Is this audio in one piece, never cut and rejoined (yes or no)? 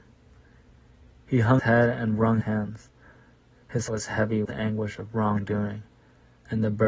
no